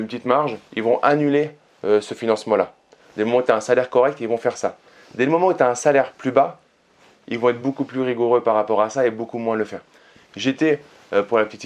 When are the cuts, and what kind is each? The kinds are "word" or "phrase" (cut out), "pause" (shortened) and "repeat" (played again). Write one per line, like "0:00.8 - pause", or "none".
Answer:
none